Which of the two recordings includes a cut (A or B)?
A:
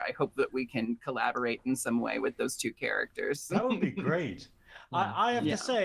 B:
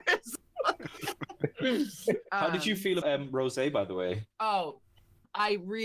B